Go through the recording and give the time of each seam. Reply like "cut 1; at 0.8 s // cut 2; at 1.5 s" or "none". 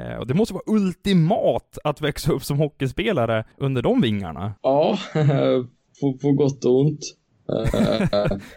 cut 1; at 3.5 s // cut 2; at 4.6 s